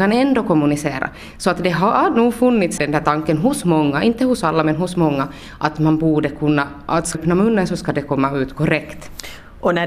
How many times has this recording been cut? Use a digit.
2